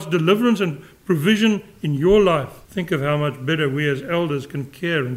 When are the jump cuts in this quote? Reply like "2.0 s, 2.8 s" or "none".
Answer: 2.6 s